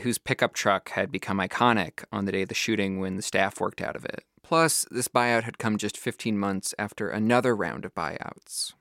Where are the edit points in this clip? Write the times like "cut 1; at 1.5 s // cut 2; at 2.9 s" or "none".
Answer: cut 1; at 4.4 s